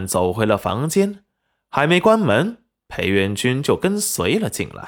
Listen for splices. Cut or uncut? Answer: uncut